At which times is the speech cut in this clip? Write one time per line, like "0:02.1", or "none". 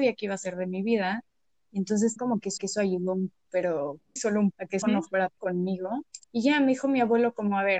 0:02.2
0:02.6
0:03.5
0:04.2
0:04.5
0:04.8
0:05.4
0:06.2